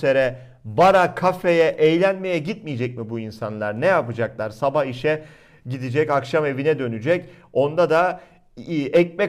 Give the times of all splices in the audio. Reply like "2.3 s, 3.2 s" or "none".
none